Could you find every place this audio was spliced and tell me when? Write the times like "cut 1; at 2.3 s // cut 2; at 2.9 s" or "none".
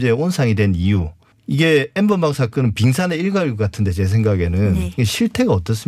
none